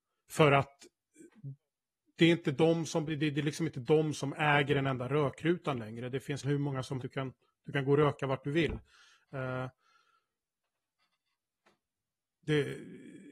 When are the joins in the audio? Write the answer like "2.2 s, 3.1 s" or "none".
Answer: 3.1 s, 6.4 s, 7.0 s